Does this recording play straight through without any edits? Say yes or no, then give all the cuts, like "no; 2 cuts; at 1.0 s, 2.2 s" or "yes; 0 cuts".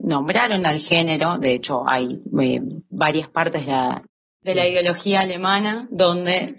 yes; 0 cuts